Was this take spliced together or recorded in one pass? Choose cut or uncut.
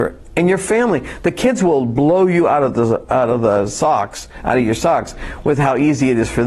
uncut